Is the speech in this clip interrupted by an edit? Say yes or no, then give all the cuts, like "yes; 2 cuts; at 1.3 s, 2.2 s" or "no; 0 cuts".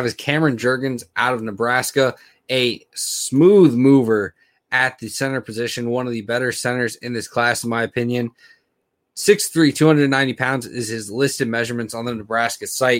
no; 0 cuts